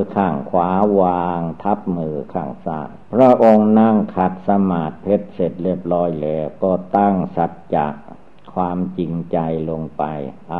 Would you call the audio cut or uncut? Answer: cut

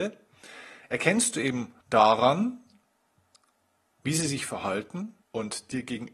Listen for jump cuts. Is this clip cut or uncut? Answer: cut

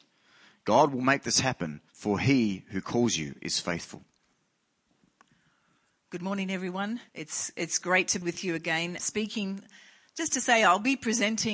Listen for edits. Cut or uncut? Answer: cut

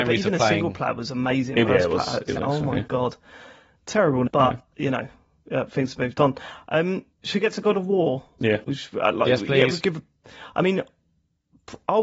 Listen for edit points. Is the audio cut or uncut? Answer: cut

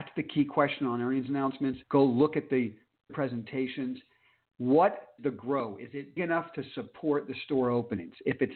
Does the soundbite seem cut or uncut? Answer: cut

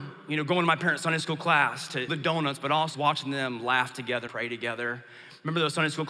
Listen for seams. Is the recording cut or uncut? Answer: cut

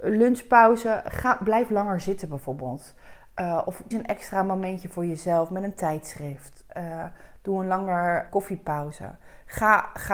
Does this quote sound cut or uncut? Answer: cut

